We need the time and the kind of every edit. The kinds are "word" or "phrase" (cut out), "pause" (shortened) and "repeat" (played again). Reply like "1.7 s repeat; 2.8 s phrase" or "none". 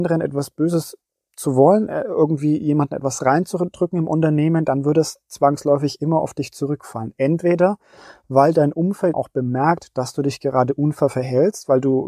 9.1 s word